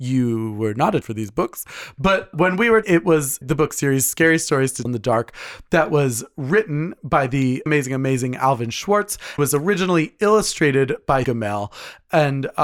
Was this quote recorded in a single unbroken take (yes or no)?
no